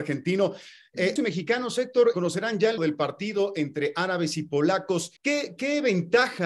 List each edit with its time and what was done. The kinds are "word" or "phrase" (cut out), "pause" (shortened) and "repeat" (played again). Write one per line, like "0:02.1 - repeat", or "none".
0:01.2 - word
0:02.1 - word
0:02.8 - word
0:05.2 - pause